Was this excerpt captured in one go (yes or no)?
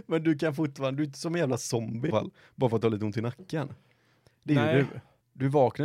no